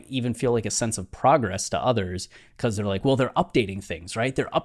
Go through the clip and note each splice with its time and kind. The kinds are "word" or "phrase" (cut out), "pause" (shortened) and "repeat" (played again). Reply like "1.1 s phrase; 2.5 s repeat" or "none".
none